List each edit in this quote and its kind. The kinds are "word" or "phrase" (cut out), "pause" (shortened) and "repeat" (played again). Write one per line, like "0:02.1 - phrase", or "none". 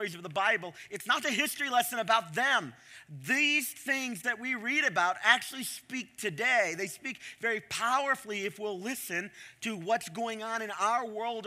0:01.2 - word